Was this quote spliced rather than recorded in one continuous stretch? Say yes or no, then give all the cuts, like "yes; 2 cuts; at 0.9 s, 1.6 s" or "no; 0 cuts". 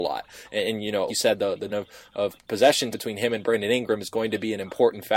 yes; 3 cuts; at 1.1 s, 1.7 s, 2.9 s